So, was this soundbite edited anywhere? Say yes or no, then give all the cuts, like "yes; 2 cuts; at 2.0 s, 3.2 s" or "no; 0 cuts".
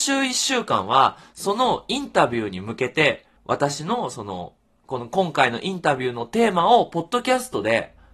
yes; 1 cut; at 3.4 s